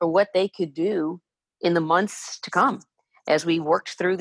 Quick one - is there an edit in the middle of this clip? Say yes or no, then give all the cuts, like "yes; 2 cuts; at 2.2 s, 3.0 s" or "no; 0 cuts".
no; 0 cuts